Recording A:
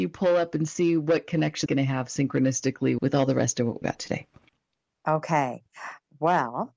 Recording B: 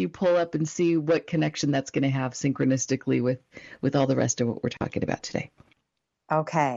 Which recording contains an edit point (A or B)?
A